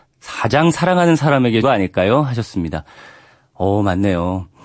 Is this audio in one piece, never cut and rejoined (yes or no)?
no